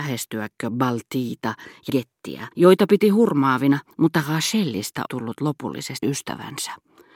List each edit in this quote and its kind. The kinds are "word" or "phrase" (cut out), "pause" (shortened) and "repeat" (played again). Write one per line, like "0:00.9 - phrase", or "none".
0:01.9 - word
0:02.5 - pause
0:03.9 - pause
0:05.1 - word
0:06.0 - word